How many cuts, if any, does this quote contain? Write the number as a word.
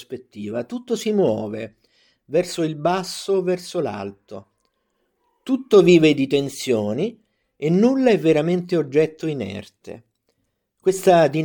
zero